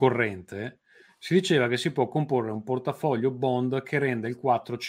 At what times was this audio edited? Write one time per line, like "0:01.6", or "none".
none